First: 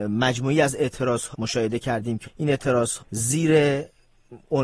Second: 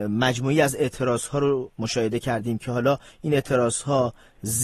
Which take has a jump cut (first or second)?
first